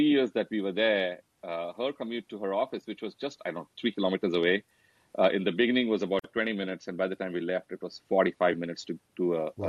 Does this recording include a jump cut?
no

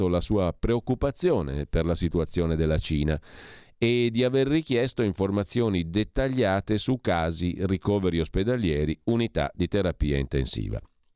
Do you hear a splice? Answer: no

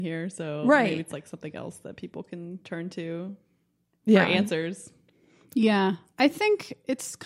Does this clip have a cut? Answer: no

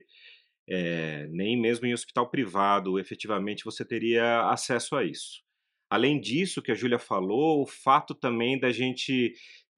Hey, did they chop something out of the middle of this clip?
no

